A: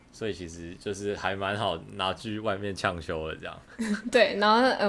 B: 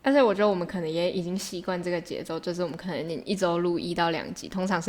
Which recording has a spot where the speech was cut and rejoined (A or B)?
A